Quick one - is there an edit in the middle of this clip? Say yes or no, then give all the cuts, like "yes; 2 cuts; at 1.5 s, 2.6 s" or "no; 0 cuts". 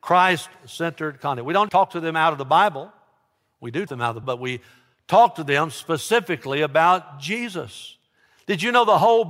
yes; 3 cuts; at 1.7 s, 3.9 s, 4.2 s